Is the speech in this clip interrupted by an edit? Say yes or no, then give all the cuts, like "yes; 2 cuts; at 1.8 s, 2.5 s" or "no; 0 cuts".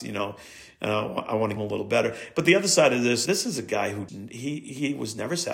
yes; 3 cuts; at 1.6 s, 3.3 s, 4.1 s